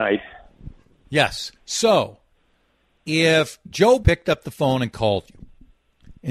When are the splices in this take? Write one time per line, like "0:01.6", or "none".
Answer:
0:01.6
0:04.0